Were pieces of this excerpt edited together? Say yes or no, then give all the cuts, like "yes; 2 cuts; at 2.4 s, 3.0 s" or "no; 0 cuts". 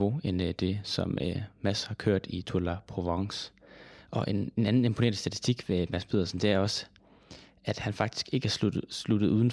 no; 0 cuts